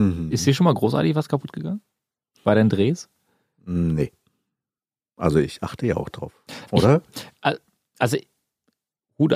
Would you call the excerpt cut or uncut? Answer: uncut